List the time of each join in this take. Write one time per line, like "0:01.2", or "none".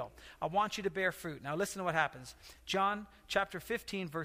none